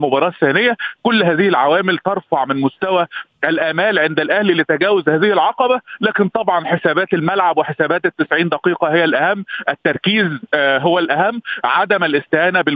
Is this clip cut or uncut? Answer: uncut